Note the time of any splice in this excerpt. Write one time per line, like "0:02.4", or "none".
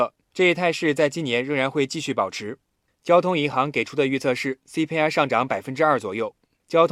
none